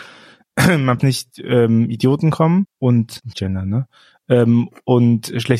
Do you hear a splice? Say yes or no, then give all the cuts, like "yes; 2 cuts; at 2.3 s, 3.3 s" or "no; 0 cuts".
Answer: yes; 2 cuts; at 1.0 s, 3.3 s